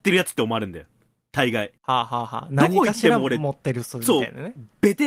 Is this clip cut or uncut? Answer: cut